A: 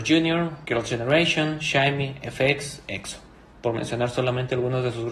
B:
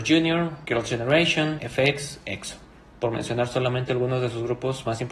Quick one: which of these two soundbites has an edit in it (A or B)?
B